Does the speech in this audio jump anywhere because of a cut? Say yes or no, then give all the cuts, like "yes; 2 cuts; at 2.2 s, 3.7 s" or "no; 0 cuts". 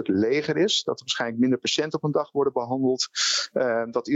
no; 0 cuts